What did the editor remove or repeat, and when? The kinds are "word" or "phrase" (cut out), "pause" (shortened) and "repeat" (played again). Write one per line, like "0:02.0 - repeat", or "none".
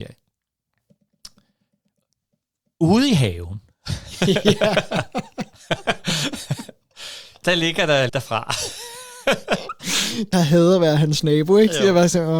0:08.1 - word
0:10.3 - phrase